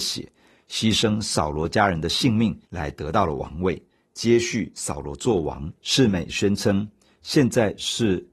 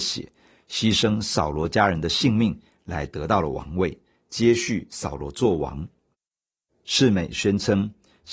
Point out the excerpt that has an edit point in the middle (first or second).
first